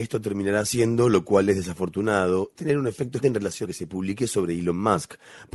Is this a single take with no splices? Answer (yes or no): no